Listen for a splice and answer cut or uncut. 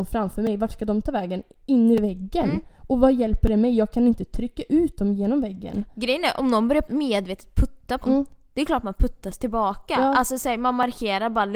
cut